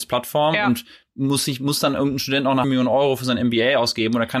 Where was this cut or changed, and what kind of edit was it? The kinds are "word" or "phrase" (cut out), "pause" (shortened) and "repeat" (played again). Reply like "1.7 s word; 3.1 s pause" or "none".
2.6 s word

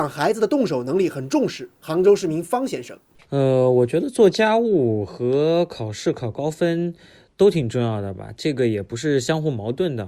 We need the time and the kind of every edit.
3.1 s pause

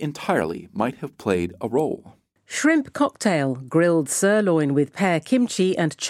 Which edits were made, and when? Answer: none

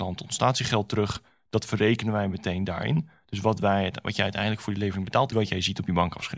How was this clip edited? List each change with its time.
5.3 s phrase

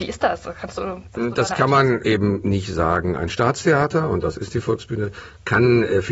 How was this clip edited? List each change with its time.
2.0 s word

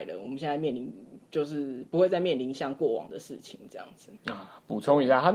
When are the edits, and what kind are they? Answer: 4.2 s pause

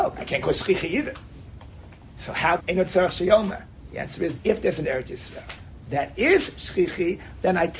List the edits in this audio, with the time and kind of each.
2.6 s word; 4.4 s word; 4.8 s word

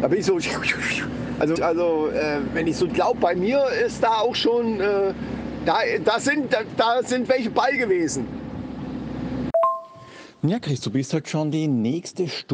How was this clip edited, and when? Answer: 1.6 s word; 2.9 s phrase

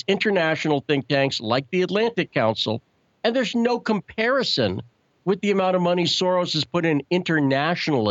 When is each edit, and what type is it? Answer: 3.5 s word

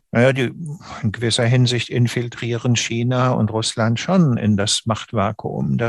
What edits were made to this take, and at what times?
none

